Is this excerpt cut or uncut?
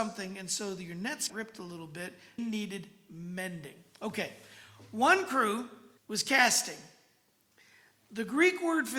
cut